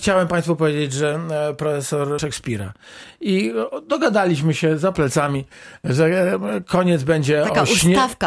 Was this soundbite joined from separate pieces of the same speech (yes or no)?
yes